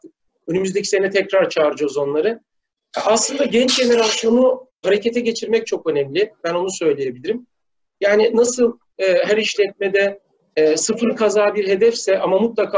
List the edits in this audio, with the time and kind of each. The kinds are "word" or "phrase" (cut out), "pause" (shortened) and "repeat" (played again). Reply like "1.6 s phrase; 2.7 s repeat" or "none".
none